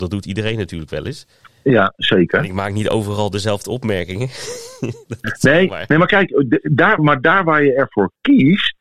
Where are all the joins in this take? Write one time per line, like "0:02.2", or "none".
0:01.4
0:05.2
0:07.0